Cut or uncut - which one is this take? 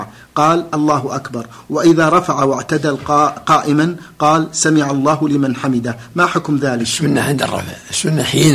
uncut